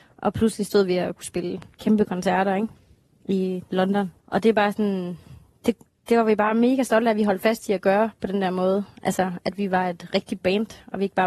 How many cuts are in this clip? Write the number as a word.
two